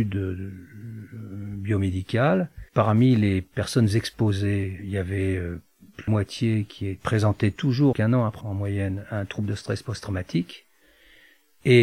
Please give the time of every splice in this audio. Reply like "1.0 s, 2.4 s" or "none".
2.7 s, 6.1 s, 7.9 s, 8.4 s